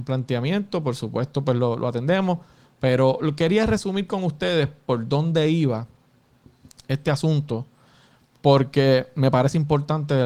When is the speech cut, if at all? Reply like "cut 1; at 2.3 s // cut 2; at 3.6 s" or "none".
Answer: none